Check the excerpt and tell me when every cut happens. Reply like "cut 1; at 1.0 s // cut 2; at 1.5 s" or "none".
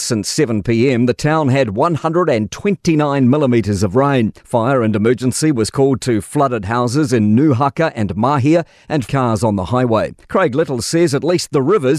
cut 1; at 4.4 s // cut 2; at 9.1 s // cut 3; at 10.2 s

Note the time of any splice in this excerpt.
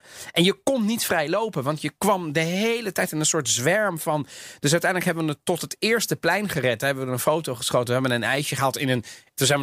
none

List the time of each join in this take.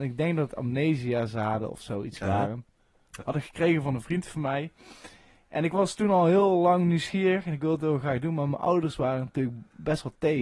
none

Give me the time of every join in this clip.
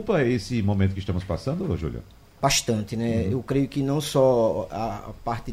none

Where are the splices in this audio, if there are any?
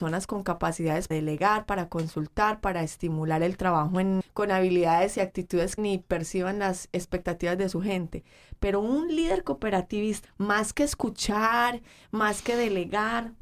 cut 1; at 1.1 s // cut 2; at 4.2 s // cut 3; at 5.8 s // cut 4; at 10.2 s

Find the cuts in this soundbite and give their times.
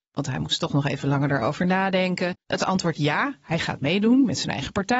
cut 1; at 2.4 s

